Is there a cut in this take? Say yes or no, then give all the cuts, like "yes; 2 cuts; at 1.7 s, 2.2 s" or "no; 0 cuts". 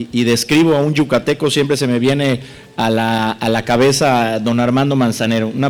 no; 0 cuts